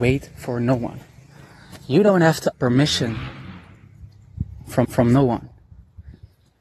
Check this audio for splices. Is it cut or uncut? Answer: cut